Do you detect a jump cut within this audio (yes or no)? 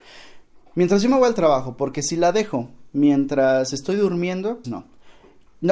yes